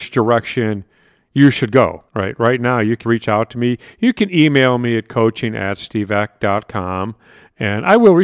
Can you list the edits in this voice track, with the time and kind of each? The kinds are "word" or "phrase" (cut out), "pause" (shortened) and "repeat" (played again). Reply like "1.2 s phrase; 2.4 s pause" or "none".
2.1 s pause; 3.0 s word